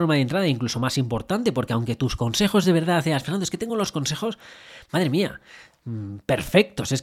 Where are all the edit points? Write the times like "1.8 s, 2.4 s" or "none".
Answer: none